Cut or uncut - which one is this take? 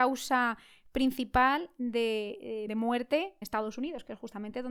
cut